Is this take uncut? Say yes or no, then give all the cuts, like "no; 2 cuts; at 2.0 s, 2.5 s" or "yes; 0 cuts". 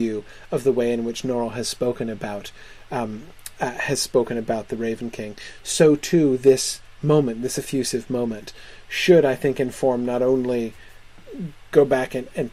yes; 0 cuts